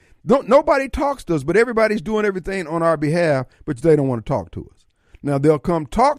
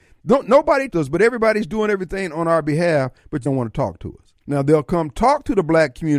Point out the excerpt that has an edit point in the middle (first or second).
second